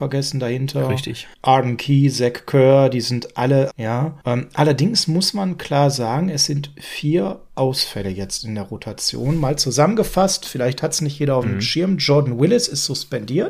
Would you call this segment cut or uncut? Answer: cut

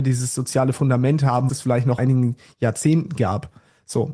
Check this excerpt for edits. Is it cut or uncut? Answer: cut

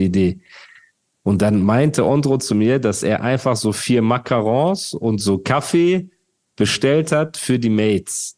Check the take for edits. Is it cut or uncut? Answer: uncut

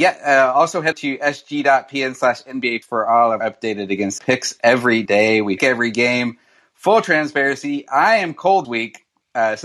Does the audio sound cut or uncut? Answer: cut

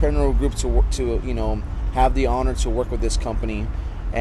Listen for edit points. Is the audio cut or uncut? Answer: uncut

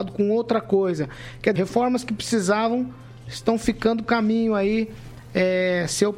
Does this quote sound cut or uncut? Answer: cut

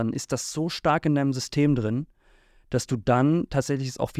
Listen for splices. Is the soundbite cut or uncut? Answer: uncut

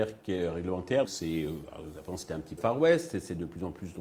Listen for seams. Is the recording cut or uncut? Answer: cut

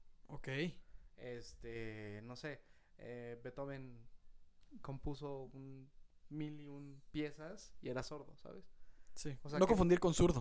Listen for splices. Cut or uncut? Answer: uncut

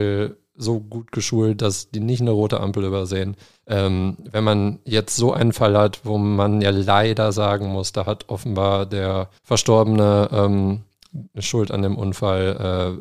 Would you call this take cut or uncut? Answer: cut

